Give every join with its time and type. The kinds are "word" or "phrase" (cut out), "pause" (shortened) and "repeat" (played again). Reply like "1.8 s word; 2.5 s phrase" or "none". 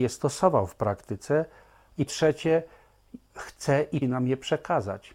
2.1 s word; 3.3 s word; 4.0 s word